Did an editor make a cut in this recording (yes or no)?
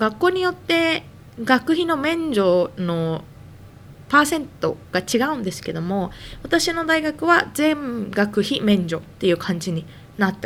no